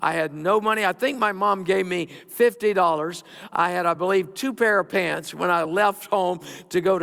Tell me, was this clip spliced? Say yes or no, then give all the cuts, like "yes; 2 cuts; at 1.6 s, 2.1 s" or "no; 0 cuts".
no; 0 cuts